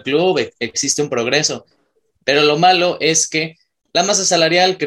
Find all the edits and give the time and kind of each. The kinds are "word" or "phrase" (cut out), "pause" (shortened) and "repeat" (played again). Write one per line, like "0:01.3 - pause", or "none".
none